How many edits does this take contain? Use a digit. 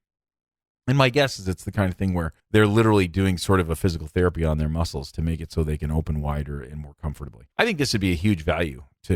2